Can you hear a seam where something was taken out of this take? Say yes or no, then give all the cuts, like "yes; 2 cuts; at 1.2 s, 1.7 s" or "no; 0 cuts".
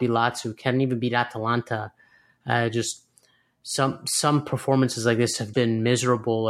yes; 1 cut; at 5.5 s